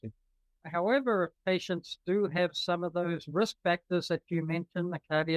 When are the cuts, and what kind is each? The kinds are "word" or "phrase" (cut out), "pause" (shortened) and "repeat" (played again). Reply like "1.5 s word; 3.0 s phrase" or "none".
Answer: none